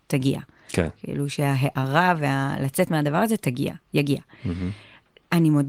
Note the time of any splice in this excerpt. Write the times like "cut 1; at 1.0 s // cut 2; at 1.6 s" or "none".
none